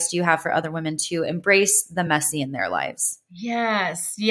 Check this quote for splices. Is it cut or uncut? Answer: uncut